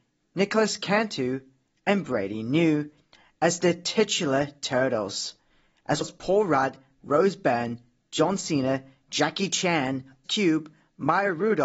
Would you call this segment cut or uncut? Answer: cut